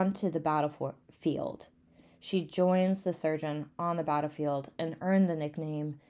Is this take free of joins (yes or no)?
yes